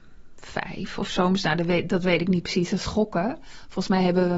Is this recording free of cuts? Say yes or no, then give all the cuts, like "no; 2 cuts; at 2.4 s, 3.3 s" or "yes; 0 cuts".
yes; 0 cuts